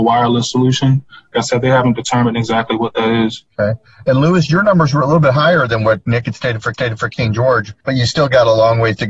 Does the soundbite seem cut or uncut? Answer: cut